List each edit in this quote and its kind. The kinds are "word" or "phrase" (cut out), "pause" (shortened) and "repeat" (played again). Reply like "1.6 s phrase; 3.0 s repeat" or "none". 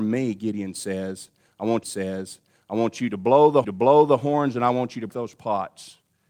1.8 s repeat; 3.6 s repeat; 5.1 s word